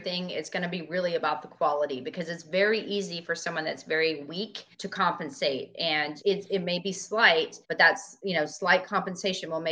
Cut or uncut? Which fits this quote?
cut